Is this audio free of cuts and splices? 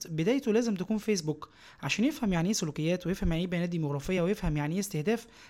yes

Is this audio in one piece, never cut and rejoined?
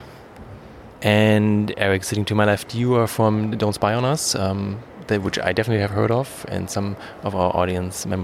yes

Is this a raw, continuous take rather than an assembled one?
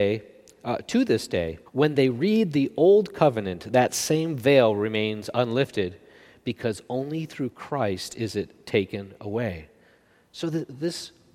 no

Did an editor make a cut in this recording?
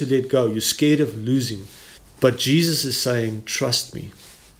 yes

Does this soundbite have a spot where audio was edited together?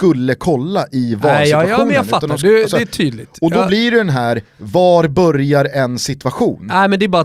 no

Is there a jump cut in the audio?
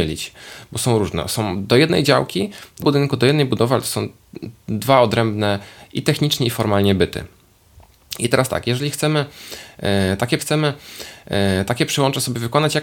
yes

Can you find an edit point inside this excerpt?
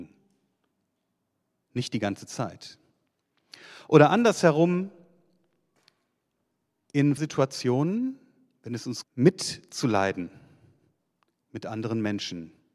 yes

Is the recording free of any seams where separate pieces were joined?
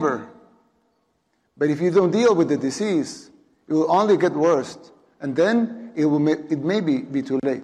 yes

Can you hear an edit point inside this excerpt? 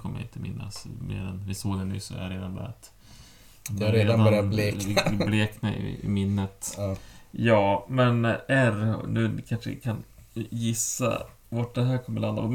no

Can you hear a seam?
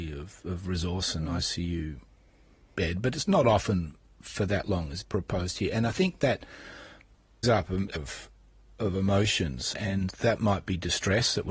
yes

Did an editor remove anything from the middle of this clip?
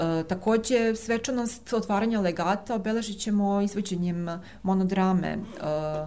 no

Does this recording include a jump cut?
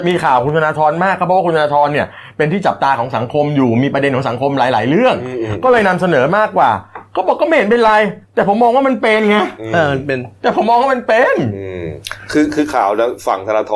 yes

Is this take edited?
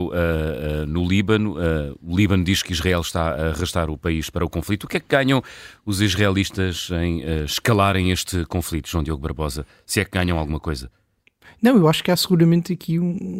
no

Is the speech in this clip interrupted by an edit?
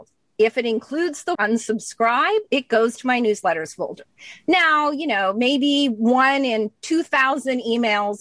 yes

